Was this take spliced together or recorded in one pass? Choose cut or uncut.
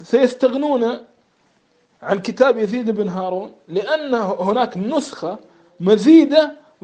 uncut